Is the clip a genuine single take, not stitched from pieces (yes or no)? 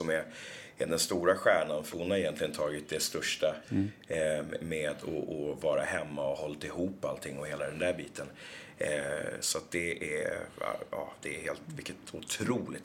no